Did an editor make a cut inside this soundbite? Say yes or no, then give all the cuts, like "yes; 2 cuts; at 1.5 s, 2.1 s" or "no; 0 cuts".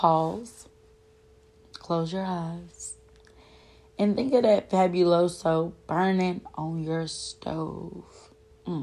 no; 0 cuts